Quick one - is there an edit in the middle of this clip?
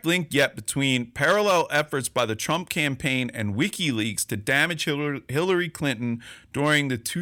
no; 0 cuts

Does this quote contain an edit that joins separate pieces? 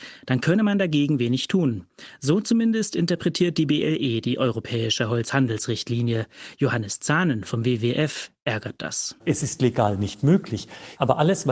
yes; 1 cut; at 9.2 s

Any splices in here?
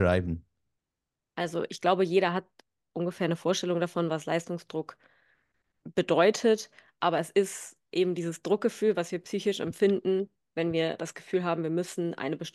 no; 0 cuts

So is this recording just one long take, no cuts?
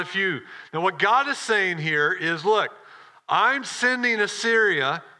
yes; 0 cuts

